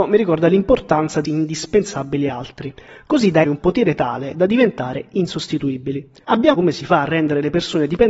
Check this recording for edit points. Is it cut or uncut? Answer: cut